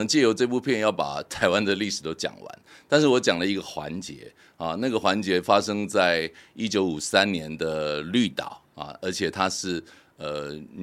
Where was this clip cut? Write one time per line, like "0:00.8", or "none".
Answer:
none